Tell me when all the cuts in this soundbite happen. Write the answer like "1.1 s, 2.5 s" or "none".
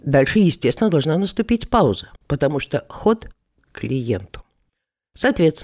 2.2 s, 3.6 s